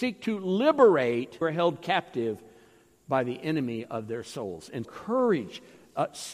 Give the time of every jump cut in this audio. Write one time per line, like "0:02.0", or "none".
0:01.4
0:04.8